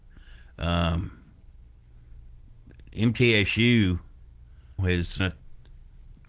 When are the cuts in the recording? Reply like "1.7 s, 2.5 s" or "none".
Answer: 4.8 s, 5.2 s